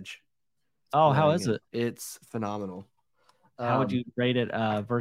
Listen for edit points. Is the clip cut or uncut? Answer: cut